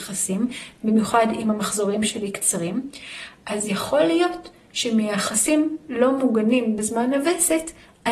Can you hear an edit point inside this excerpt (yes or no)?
no